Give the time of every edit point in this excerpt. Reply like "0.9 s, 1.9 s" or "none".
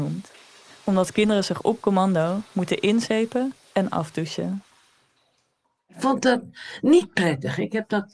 none